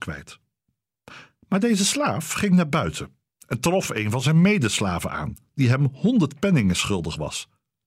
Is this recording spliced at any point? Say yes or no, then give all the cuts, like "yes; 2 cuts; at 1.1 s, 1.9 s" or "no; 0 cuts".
no; 0 cuts